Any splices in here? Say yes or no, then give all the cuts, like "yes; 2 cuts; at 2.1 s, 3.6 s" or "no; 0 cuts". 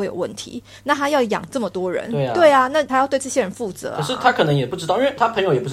no; 0 cuts